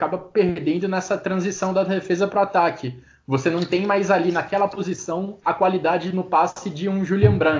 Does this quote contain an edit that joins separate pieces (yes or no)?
no